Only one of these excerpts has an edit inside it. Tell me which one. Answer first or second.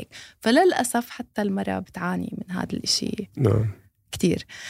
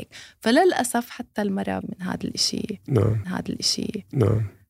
second